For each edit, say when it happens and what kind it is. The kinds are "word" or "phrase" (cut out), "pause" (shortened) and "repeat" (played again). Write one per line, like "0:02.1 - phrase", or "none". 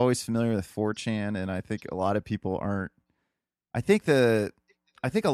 none